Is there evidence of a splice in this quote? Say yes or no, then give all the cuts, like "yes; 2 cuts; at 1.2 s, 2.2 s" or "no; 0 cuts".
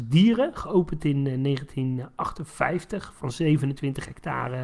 no; 0 cuts